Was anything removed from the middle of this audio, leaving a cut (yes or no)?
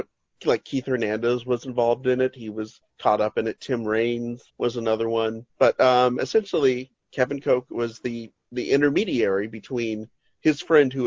yes